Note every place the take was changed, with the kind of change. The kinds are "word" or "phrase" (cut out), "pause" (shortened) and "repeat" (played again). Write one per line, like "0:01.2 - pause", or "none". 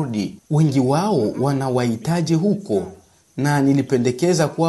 none